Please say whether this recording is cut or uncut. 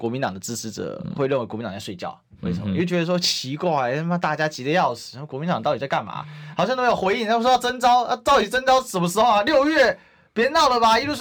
uncut